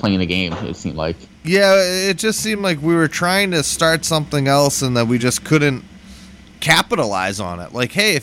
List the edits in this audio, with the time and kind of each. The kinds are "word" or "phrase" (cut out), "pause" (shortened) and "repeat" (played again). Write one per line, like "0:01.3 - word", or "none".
none